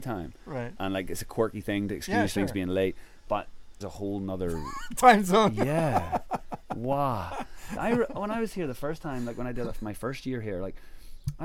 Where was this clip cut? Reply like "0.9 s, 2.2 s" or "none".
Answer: 3.8 s